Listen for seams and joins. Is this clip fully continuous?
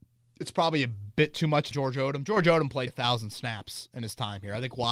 no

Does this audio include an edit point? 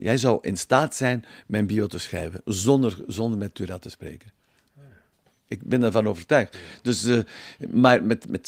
no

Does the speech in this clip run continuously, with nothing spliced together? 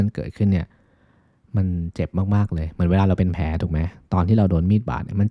yes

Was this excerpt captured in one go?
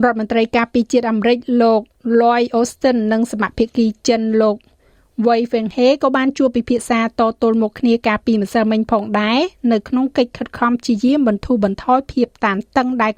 yes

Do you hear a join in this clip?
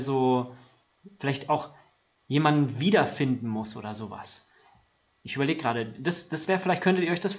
no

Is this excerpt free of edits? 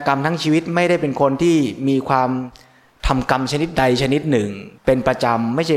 no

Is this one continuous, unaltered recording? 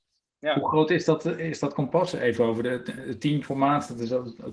yes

